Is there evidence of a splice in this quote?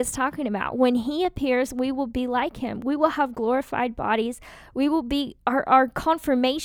yes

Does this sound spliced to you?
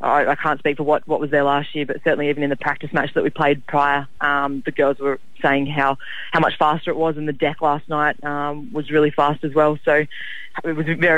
no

